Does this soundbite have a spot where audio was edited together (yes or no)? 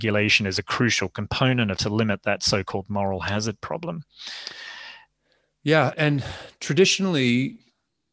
yes